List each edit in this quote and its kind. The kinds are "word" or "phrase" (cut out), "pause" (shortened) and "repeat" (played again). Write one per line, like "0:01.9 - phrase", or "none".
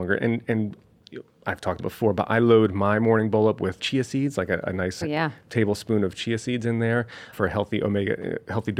0:01.8 - word
0:03.8 - word
0:05.0 - word
0:07.3 - word